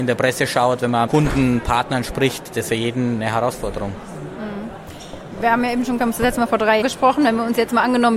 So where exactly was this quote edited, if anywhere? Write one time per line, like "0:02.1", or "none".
0:01.1
0:02.7
0:06.0
0:06.8

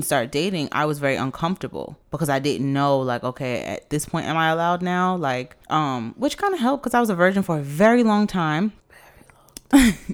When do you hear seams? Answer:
0:02.0
0:05.6
0:08.8

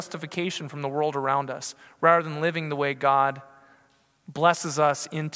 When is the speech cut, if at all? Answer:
none

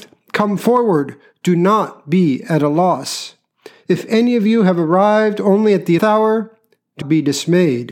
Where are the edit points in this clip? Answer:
0:06.0
0:07.0

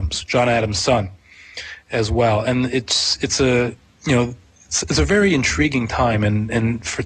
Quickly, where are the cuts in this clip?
none

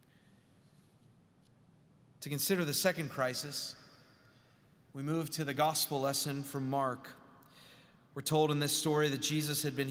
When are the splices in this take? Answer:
none

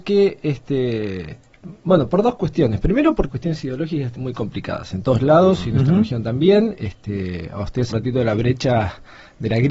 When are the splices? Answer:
0:01.8
0:03.3
0:04.2
0:07.9

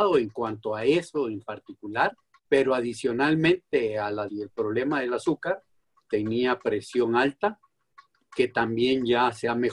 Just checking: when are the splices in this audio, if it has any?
0:02.4
0:04.3
0:06.1

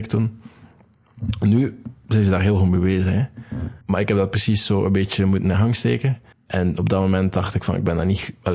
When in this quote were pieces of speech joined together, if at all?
0:03.8
0:06.3

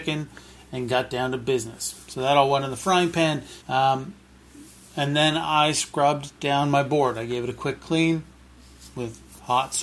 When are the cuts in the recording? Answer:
0:03.6

